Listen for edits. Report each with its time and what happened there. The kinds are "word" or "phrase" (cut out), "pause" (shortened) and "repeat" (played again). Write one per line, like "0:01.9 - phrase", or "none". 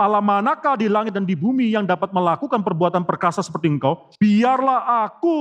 0:04.1 - pause